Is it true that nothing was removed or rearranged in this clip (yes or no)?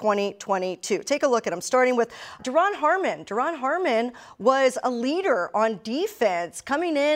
no